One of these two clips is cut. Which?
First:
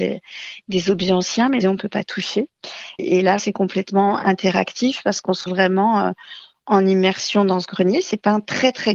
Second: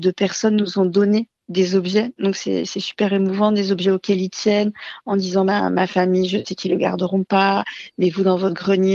first; 3 cuts; at 1.6 s, 3.4 s, 5.5 s

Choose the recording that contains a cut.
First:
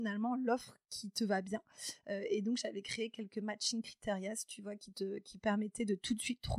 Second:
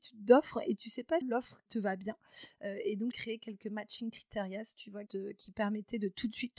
second; 4 cuts; at 1.2 s, 1.7 s, 3.1 s, 5.1 s

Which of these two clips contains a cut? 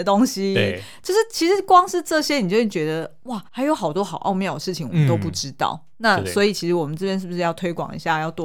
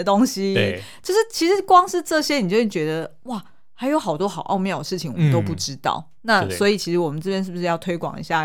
first; 1 cut; at 3.5 s

